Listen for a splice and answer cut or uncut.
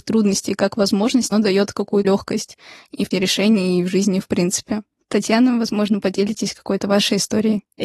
cut